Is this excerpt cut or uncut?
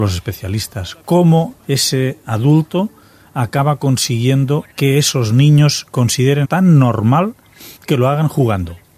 cut